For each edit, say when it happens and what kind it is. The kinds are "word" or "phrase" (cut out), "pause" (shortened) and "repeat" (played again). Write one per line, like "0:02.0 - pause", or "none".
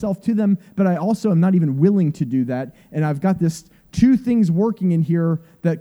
none